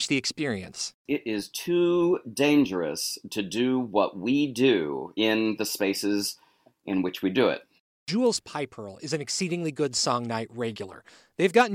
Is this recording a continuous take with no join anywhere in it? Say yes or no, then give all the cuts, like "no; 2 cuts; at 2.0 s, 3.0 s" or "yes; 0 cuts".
yes; 0 cuts